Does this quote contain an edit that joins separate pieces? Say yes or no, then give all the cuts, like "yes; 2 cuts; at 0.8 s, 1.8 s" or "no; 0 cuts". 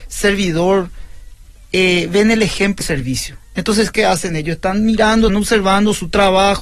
yes; 3 cuts; at 2.8 s, 3.9 s, 5.3 s